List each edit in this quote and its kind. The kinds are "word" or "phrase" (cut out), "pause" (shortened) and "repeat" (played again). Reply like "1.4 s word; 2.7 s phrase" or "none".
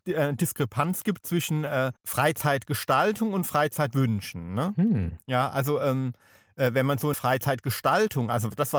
2.0 s pause; 7.1 s phrase